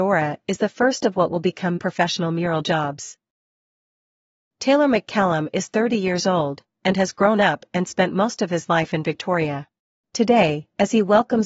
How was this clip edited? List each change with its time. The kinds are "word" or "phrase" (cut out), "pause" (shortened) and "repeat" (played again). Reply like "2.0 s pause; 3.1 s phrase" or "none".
1.8 s word; 9.9 s pause